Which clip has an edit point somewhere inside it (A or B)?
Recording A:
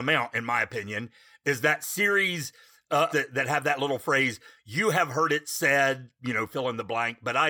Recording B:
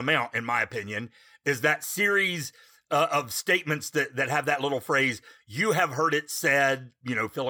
A